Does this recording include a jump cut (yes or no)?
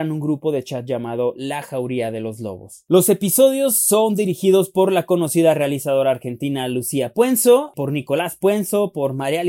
no